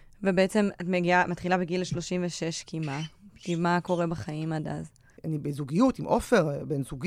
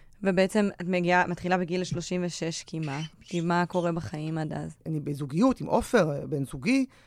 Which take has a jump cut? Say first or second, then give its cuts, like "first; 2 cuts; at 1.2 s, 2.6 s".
second; 2 cuts; at 3.1 s, 4.8 s